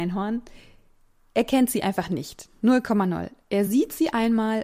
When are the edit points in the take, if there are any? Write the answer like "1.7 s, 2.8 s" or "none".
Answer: none